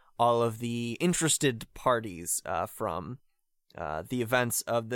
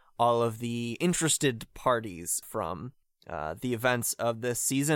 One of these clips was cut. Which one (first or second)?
second